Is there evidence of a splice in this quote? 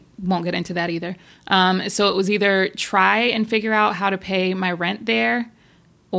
no; 0 cuts

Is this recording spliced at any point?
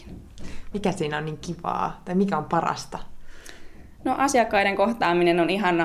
no; 0 cuts

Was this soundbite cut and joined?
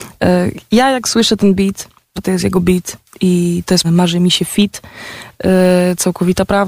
yes; 2 cuts; at 2.2 s, 3.8 s

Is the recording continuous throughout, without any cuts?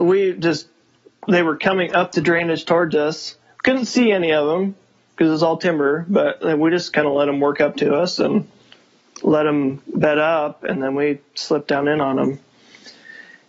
yes; 0 cuts

